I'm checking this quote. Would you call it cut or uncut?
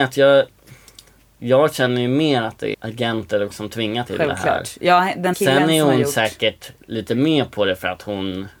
cut